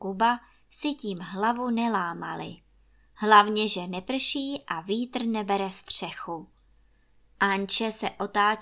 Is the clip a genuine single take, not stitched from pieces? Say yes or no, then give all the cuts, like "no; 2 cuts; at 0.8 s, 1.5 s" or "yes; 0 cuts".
yes; 0 cuts